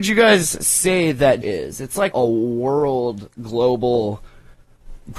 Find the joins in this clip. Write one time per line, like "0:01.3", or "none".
0:01.4
0:02.1